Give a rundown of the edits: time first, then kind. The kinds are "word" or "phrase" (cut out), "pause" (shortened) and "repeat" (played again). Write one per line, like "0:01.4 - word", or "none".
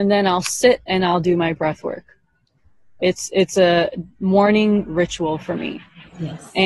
none